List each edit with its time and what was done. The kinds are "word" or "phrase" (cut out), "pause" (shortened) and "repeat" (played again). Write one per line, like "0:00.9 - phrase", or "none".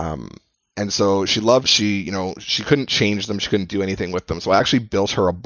0:01.7 - phrase